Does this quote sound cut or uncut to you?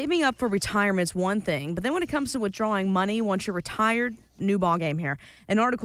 uncut